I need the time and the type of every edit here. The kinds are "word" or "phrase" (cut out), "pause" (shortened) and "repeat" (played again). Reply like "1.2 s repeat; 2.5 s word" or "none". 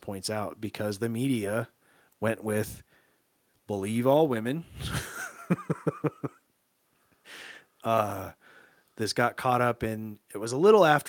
none